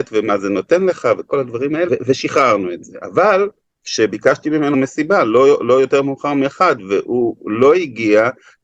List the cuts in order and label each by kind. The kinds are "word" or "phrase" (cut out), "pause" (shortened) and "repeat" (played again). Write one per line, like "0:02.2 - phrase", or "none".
0:01.9 - word
0:03.6 - pause
0:04.7 - phrase